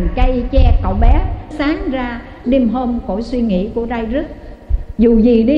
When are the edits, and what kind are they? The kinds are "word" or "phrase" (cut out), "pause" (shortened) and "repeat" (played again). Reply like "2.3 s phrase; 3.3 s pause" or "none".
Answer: 1.5 s word; 2.4 s word